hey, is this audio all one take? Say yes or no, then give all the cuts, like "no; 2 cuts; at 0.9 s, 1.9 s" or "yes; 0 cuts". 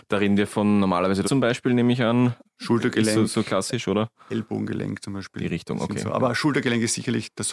no; 1 cut; at 1.2 s